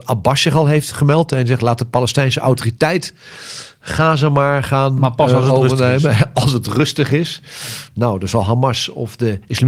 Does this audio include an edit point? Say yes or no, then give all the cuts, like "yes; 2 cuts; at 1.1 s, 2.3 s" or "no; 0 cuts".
no; 0 cuts